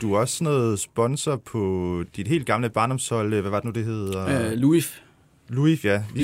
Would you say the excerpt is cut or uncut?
uncut